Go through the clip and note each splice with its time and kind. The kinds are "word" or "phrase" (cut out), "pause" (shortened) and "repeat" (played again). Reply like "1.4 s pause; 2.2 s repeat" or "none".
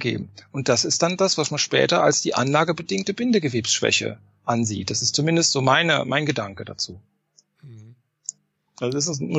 none